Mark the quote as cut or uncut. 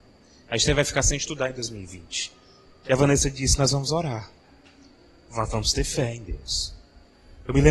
uncut